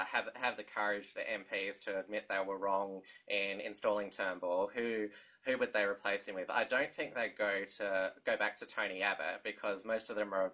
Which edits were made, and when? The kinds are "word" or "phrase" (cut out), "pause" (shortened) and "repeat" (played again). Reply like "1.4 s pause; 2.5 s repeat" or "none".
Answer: none